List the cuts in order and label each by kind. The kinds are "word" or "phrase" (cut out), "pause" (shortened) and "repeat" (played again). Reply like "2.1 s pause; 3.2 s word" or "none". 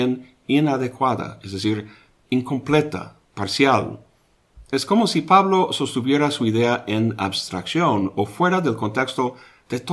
none